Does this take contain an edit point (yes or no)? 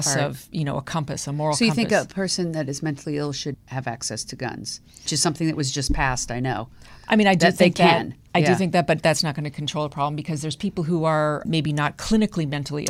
yes